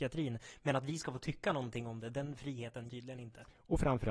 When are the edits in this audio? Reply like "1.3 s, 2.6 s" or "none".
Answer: 2.9 s